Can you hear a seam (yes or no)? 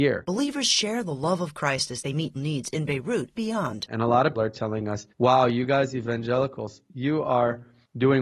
yes